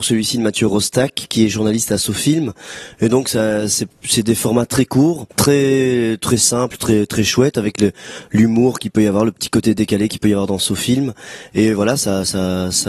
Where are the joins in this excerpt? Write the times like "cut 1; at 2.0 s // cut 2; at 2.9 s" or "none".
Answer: cut 1; at 5.3 s